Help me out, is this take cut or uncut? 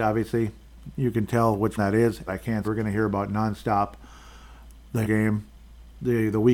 cut